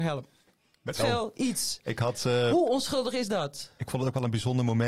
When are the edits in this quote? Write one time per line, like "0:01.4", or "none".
0:01.0